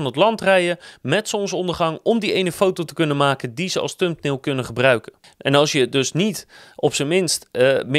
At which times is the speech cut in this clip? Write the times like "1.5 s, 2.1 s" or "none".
none